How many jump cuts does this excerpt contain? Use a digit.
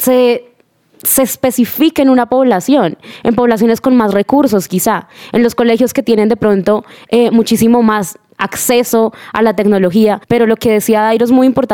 1